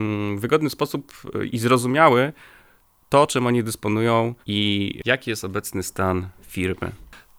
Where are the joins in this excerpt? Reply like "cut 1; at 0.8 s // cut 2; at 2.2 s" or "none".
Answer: cut 1; at 4.4 s